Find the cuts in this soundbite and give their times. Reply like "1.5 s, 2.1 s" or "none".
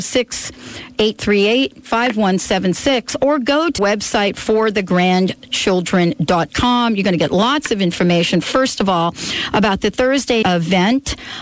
1.8 s, 3.8 s, 10.4 s